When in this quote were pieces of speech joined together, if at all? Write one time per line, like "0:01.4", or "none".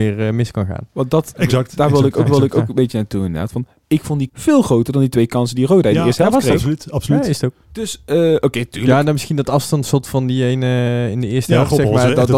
0:02.3
0:04.3
0:07.6